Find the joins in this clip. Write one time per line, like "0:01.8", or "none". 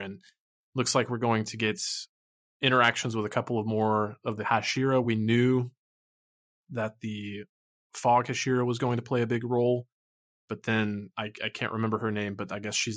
none